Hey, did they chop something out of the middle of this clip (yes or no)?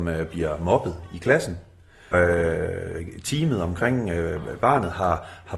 yes